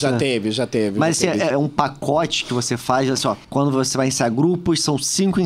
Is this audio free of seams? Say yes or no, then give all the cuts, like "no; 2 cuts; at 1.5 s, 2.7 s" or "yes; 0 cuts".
no; 2 cuts; at 1.5 s, 3.4 s